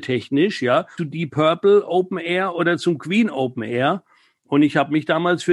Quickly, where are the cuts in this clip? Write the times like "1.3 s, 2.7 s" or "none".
1.0 s